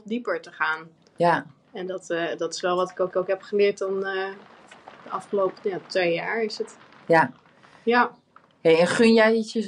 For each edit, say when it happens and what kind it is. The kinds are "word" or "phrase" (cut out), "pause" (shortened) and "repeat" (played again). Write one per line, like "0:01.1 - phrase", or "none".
0:03.1 - repeat